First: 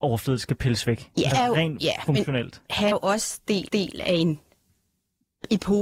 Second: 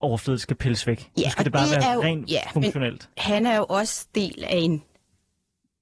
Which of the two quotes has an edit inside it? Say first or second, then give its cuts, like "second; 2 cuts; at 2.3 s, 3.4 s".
first; 3 cuts; at 1.3 s, 2.9 s, 3.7 s